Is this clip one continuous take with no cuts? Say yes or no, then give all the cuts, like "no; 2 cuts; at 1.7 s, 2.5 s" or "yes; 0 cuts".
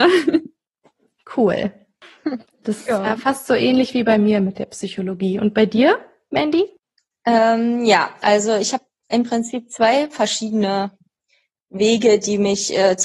yes; 0 cuts